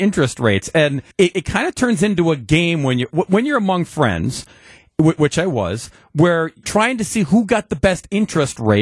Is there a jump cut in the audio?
yes; 2 cuts; at 1.1 s, 6.6 s

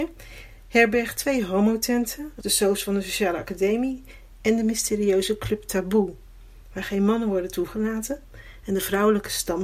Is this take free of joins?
no; 1 cut; at 2.4 s

